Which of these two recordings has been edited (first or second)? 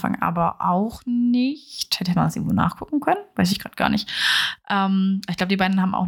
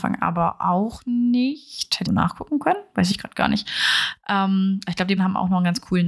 second